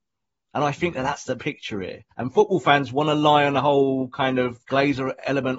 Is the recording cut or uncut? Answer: cut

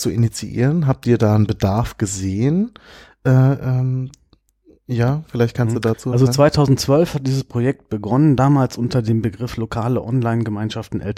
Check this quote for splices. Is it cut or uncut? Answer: uncut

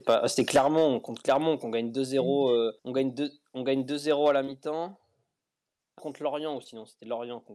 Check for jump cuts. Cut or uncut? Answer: cut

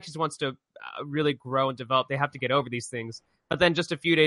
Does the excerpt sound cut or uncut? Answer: uncut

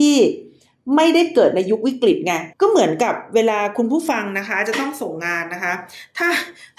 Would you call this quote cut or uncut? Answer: cut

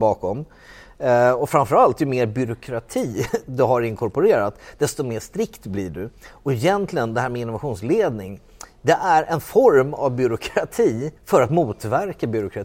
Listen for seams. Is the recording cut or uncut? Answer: cut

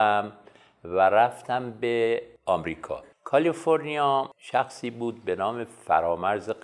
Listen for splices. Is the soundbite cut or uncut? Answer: cut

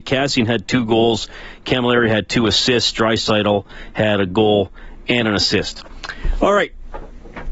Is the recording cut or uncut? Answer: uncut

